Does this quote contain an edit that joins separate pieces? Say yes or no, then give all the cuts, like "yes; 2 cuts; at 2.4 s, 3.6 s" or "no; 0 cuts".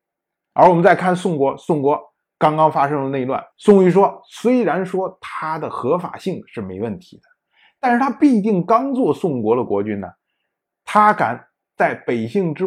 yes; 1 cut; at 3.5 s